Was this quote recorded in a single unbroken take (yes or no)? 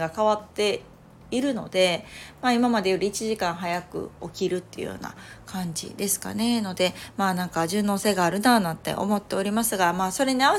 yes